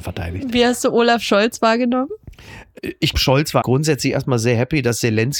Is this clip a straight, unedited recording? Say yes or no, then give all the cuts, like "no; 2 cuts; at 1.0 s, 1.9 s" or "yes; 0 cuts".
no; 2 cuts; at 3.1 s, 3.6 s